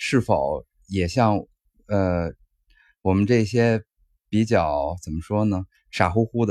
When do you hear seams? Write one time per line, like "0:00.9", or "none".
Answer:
none